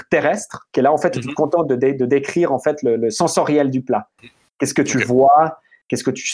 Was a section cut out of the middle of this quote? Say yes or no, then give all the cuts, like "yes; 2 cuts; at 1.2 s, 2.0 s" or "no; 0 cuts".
no; 0 cuts